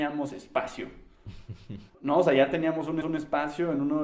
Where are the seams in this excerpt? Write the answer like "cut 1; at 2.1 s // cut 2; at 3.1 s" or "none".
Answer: cut 1; at 1.9 s // cut 2; at 3.0 s